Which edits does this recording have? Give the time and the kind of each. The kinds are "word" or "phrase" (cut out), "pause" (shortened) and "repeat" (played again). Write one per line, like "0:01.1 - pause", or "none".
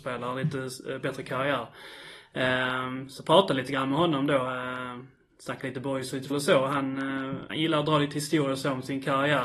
0:06.3 - word
0:07.5 - word